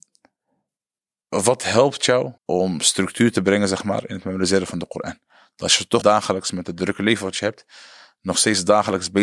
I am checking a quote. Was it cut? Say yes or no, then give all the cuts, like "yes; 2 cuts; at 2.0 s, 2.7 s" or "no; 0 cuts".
yes; 2 cuts; at 2.4 s, 6.0 s